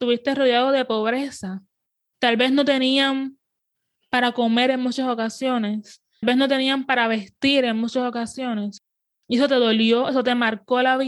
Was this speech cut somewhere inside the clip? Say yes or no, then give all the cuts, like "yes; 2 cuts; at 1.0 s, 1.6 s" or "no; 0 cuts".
yes; 1 cut; at 6.2 s